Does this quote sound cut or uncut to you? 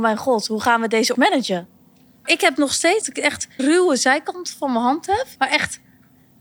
cut